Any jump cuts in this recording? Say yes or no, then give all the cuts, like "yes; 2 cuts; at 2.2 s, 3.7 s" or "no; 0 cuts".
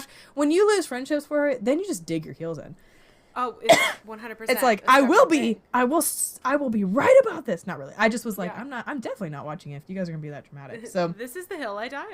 no; 0 cuts